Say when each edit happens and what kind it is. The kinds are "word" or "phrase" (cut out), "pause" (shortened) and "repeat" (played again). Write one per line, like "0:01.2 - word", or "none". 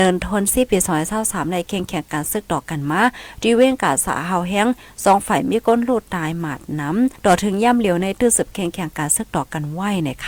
0:07.2 - pause